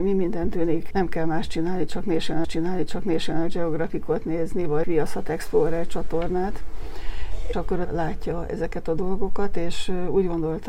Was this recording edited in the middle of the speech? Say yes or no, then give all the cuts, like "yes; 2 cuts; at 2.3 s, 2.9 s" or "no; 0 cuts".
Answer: yes; 5 cuts; at 0.9 s, 2.4 s, 4.8 s, 7.5 s, 7.8 s